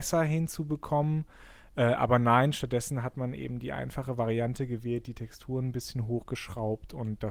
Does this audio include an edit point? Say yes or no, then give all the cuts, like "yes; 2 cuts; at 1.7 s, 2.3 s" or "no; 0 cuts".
no; 0 cuts